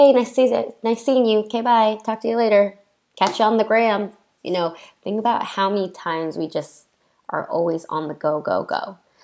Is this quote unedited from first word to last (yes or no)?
yes